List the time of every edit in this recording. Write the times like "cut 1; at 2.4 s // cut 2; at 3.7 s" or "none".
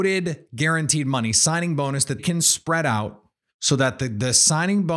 cut 1; at 2.2 s // cut 2; at 3.4 s